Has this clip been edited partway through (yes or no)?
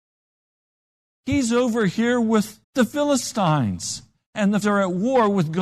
yes